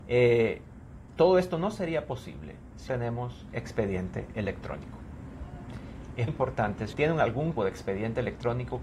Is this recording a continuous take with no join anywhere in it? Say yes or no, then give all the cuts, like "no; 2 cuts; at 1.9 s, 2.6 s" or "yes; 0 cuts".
no; 4 cuts; at 2.9 s, 6.3 s, 6.9 s, 7.6 s